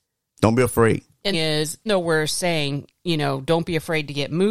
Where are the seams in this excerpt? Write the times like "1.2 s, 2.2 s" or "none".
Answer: 1.3 s, 1.9 s